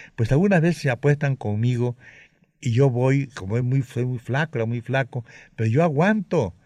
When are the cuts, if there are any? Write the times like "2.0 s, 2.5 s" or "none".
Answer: none